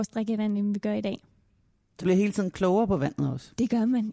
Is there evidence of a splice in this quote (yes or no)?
yes